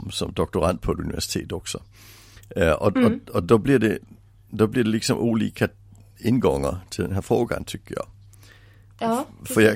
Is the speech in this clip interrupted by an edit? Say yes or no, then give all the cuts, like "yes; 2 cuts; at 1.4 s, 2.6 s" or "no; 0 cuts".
no; 0 cuts